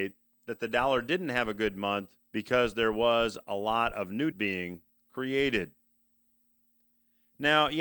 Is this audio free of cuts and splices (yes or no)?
no